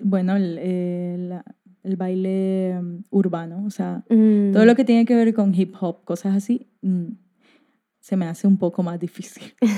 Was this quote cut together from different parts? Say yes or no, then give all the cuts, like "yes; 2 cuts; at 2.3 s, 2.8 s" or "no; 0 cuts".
no; 0 cuts